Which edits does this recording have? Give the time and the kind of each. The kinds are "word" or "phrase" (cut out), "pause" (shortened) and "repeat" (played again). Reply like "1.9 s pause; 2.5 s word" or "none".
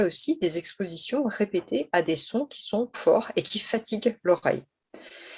2.9 s word